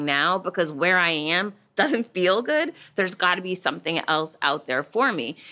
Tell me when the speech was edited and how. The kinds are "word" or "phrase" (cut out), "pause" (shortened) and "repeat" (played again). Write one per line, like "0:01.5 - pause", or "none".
none